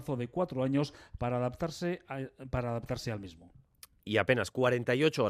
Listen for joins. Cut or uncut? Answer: uncut